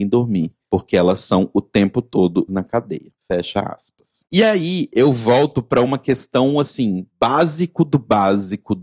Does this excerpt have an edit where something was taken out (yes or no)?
yes